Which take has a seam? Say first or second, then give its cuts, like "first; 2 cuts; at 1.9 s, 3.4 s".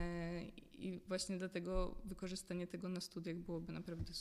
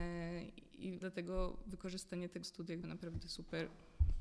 second; 3 cuts; at 1.0 s, 2.4 s, 2.8 s